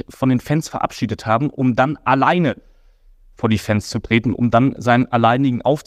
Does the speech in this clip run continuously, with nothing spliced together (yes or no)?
yes